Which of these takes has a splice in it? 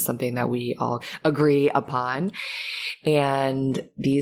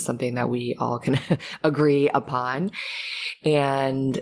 first; 1 cut; at 1.0 s

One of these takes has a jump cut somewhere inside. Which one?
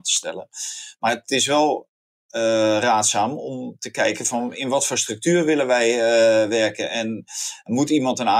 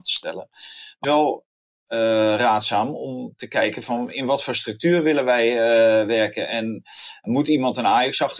second; 1 cut; at 1.0 s

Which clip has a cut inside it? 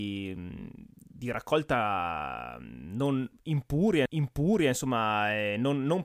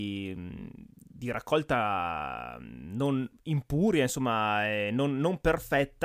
first; 1 cut; at 4.1 s

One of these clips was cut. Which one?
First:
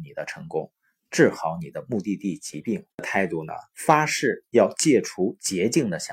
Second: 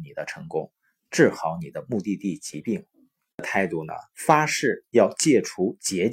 first; 1 cut; at 2.9 s

